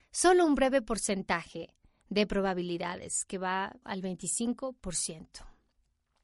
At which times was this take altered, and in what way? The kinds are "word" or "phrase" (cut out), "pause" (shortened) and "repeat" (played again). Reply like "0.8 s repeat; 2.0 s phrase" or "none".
3.8 s word